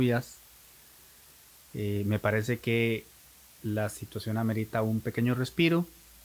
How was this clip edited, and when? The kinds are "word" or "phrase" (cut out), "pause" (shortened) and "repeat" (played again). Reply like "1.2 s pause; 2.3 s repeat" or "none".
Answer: none